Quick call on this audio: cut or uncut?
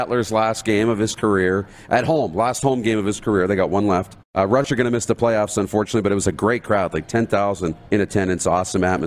cut